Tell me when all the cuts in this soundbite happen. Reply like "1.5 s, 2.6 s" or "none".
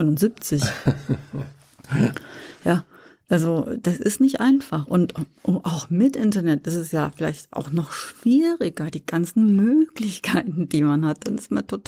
none